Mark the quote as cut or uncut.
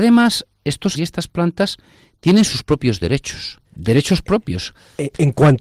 cut